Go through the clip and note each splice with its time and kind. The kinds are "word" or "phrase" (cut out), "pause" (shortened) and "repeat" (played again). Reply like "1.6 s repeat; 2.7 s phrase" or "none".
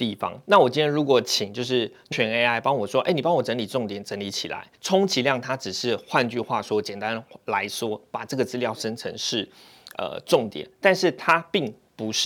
2.1 s word; 4.8 s pause